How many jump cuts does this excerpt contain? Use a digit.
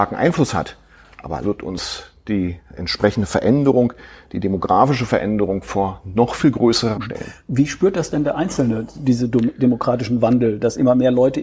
3